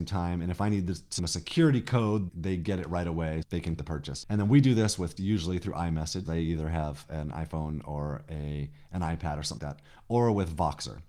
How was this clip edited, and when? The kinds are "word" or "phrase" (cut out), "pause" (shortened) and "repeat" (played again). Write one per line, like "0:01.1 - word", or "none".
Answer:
0:01.2 - word
0:02.3 - word
0:03.4 - word
0:03.8 - word
0:05.2 - word
0:06.2 - word
0:09.6 - word